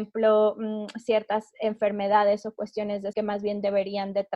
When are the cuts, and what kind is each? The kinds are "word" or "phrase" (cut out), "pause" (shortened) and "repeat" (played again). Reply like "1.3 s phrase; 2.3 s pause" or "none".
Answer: 3.1 s word